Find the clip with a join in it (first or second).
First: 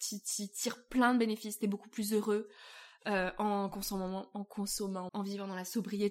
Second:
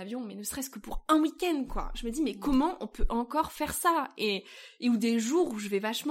first